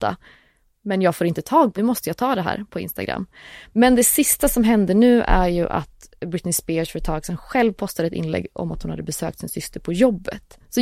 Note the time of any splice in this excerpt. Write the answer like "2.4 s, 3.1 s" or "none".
1.8 s